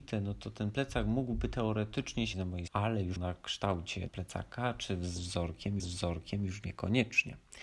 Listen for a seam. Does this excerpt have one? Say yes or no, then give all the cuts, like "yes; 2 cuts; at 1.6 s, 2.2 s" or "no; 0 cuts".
yes; 5 cuts; at 2.3 s, 2.7 s, 3.2 s, 4.1 s, 5.8 s